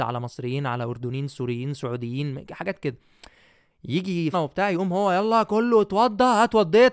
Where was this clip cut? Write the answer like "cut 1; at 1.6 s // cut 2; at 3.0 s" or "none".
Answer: cut 1; at 4.3 s

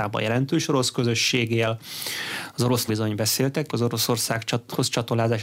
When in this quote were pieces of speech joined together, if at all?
cut 1; at 2.9 s // cut 2; at 3.7 s

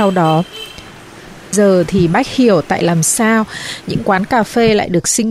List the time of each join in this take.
cut 1; at 1.5 s

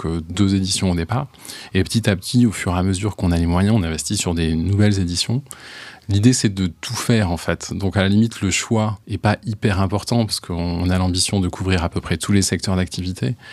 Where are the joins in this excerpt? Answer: cut 1; at 9.0 s

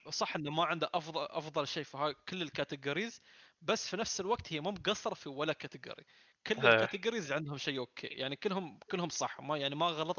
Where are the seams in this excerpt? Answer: none

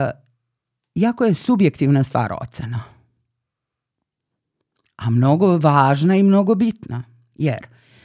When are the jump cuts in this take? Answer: none

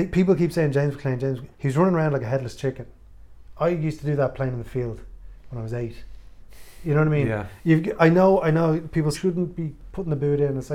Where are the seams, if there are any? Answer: cut 1; at 1.5 s // cut 2; at 8.0 s // cut 3; at 9.1 s

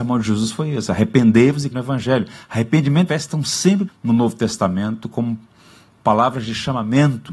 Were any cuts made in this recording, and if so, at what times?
cut 1; at 1.7 s // cut 2; at 3.1 s // cut 3; at 3.9 s

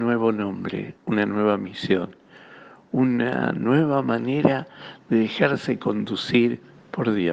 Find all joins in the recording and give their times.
cut 1; at 1.0 s

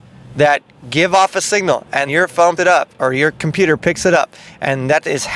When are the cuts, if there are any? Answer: cut 1; at 2.1 s // cut 2; at 2.6 s

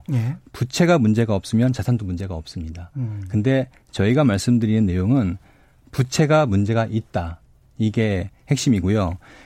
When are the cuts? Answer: none

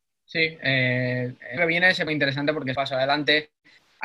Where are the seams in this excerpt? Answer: cut 1; at 1.6 s // cut 2; at 2.1 s // cut 3; at 2.7 s

